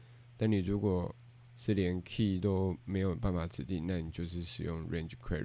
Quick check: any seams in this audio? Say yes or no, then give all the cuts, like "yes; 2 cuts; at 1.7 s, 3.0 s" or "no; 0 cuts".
no; 0 cuts